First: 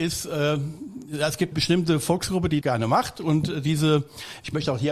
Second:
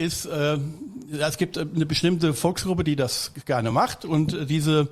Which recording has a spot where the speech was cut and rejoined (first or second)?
first